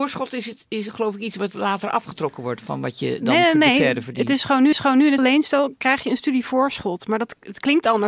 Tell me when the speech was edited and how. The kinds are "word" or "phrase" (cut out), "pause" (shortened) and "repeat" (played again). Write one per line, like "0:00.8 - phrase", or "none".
0:04.7 - repeat
0:05.2 - word